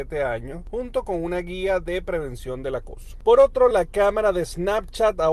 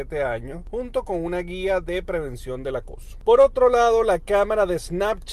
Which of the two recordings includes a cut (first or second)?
first